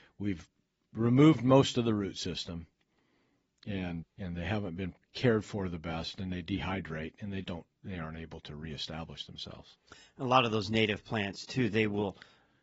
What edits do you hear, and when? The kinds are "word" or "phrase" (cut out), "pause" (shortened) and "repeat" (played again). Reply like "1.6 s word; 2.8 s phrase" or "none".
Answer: 4.0 s word; 5.0 s pause; 7.4 s word